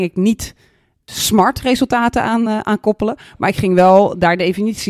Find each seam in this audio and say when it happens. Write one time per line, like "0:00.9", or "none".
none